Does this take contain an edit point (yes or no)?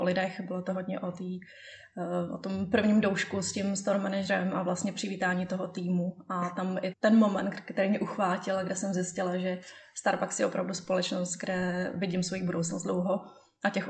yes